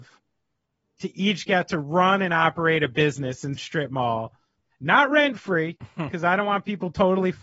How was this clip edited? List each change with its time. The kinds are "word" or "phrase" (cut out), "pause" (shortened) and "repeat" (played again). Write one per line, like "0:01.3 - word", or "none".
0:03.6 - word